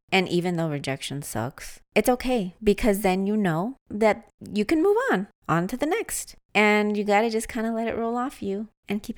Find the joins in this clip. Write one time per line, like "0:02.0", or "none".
none